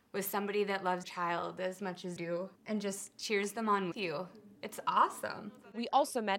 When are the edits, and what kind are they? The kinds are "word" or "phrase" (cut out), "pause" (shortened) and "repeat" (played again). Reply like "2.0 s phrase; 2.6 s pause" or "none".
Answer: 1.0 s word; 2.2 s word; 2.6 s pause; 3.9 s word; 4.6 s pause